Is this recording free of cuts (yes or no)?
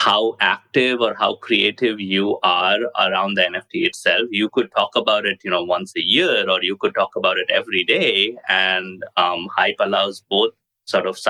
yes